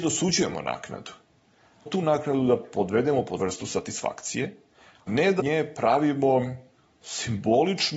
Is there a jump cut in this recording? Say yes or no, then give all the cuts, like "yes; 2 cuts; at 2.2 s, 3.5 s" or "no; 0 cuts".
yes; 4 cuts; at 1.9 s, 3.4 s, 5.1 s, 5.4 s